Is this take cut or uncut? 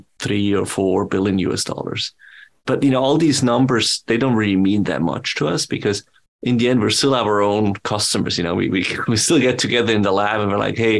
uncut